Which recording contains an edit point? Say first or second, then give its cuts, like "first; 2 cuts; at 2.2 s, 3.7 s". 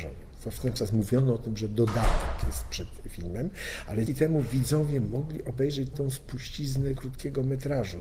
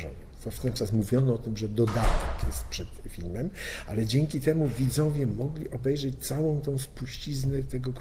first; 3 cuts; at 4.1 s, 5.9 s, 7.0 s